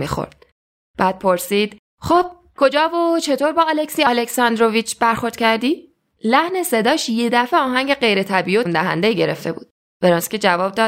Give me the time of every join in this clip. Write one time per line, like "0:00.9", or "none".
0:01.9
0:08.7